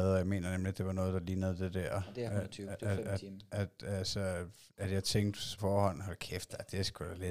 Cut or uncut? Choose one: cut